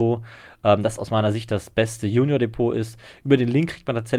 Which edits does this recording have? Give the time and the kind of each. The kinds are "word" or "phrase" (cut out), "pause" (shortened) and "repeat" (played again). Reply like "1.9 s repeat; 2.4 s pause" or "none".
none